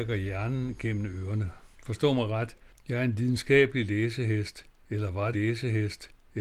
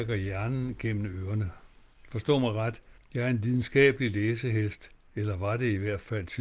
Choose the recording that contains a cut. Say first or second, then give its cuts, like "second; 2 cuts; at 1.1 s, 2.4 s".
first; 2 cuts; at 1.7 s, 5.3 s